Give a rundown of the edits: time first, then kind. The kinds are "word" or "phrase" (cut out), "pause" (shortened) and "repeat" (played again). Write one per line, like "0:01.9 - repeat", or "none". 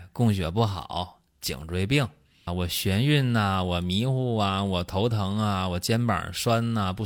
0:02.5 - word